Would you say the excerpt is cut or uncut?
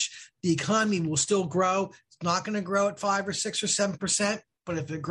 uncut